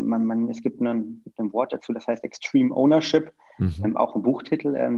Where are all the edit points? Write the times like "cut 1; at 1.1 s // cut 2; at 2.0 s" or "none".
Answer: none